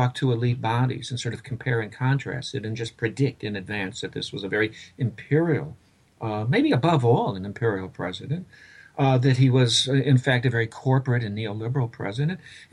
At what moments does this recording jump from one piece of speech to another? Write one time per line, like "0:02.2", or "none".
none